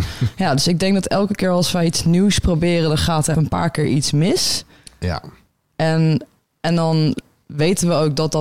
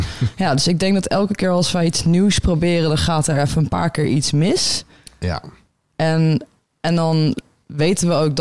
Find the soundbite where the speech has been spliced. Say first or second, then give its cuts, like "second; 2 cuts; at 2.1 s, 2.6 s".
first; 1 cut; at 3.3 s